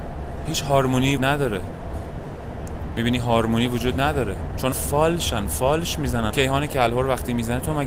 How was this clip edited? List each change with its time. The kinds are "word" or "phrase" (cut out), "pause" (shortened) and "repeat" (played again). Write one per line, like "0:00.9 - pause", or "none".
0:01.2 - word
0:04.7 - word
0:06.3 - word

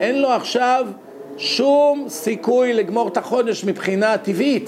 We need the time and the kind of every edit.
none

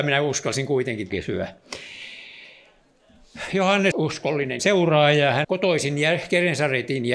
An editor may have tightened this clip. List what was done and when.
0:01.1 - word
0:03.9 - word
0:04.6 - word
0:05.4 - word

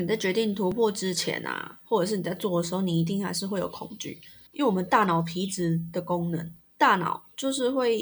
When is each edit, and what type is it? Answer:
0:04.5 - pause
0:06.6 - pause

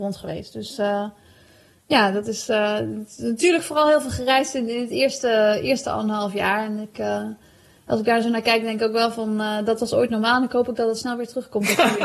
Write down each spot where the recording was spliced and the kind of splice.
none

